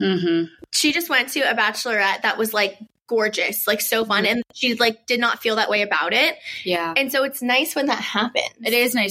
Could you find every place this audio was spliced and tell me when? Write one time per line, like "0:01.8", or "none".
none